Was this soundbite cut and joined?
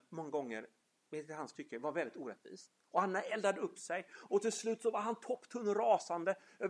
no; 0 cuts

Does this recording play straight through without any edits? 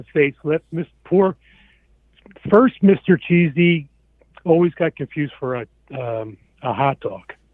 yes; 0 cuts

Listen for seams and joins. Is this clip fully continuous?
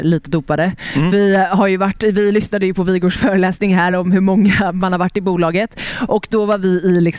yes; 0 cuts

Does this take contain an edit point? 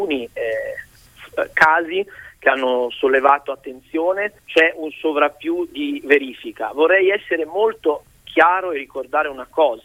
yes; 1 cut; at 4.4 s

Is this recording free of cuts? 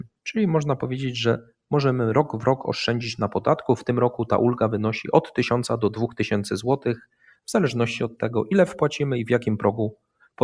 yes; 0 cuts

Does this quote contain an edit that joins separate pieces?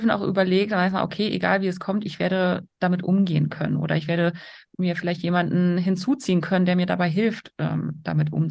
no; 0 cuts

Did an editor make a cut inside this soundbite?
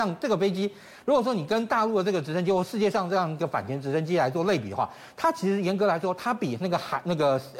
no; 0 cuts

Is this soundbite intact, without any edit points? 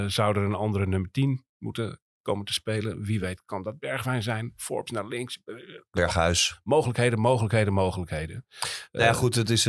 yes; 0 cuts

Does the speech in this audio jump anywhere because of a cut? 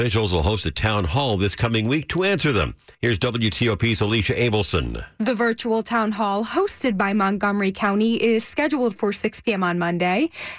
yes; 1 cut; at 2.9 s

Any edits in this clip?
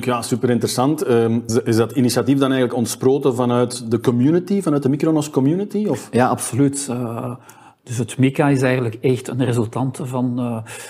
yes; 1 cut; at 1.5 s

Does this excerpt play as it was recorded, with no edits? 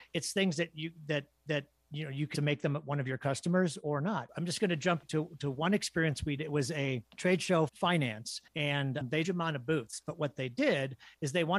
no; 8 cuts; at 1.5 s, 2.3 s, 5.0 s, 6.4 s, 7.1 s, 7.7 s, 8.5 s, 9.2 s

